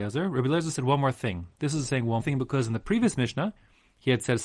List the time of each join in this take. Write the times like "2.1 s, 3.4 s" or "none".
2.2 s